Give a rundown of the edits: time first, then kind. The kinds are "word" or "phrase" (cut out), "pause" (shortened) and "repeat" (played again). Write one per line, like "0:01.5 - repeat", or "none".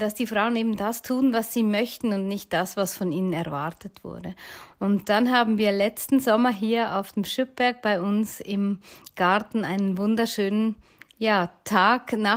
none